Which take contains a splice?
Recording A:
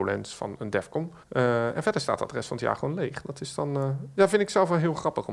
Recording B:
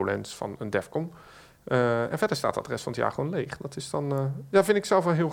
A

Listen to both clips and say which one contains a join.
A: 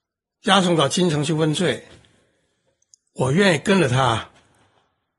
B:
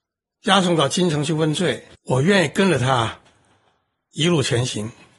B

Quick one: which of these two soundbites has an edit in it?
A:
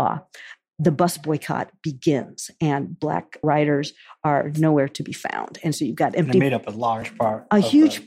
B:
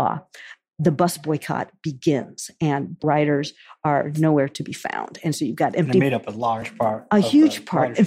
B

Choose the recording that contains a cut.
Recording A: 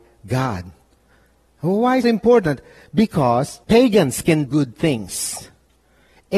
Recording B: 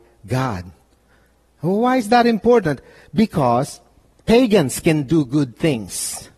A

